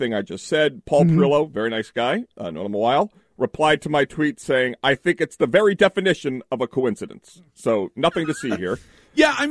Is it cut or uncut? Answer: uncut